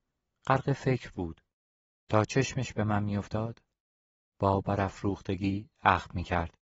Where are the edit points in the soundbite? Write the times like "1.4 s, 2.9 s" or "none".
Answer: 1.8 s